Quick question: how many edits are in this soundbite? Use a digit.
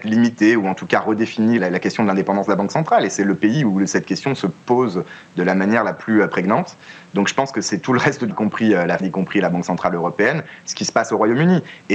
3